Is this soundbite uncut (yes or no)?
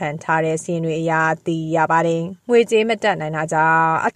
no